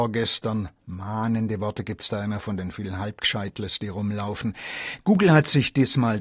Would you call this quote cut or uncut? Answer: uncut